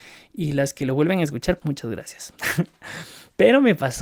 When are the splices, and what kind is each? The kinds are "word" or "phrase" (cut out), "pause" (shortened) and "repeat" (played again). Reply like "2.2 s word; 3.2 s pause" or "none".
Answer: 1.6 s word